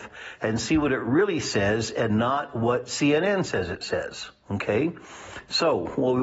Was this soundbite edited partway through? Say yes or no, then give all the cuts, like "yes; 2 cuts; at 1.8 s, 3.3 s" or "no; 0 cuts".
no; 0 cuts